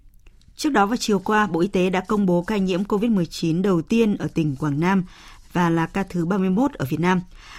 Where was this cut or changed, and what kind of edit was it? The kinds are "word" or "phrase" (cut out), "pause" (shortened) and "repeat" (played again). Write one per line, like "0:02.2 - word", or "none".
none